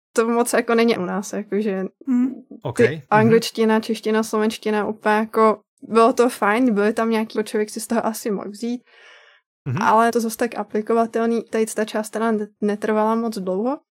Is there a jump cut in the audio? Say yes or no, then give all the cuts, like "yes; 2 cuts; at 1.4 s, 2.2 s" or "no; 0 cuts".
yes; 4 cuts; at 0.9 s, 7.4 s, 10.1 s, 11.5 s